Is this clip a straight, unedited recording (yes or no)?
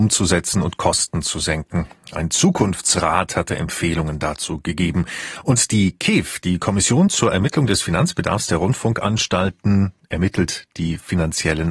yes